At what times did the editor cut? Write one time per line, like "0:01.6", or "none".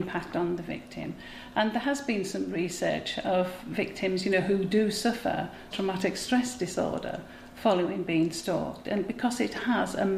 0:05.7